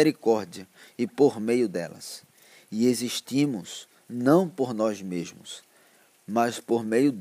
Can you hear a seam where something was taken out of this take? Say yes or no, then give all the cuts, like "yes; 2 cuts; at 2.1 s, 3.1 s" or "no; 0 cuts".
no; 0 cuts